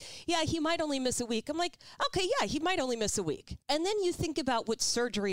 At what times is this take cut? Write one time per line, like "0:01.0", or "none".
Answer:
0:03.6